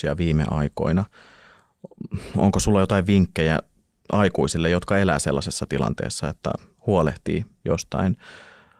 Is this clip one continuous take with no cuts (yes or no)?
yes